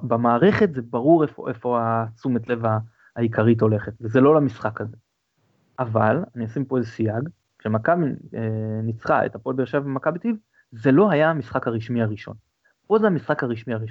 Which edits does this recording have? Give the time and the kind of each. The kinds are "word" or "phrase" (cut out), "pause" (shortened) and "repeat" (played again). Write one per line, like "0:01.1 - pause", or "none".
none